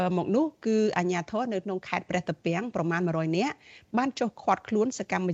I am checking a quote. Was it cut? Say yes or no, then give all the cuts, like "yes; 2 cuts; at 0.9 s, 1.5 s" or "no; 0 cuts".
no; 0 cuts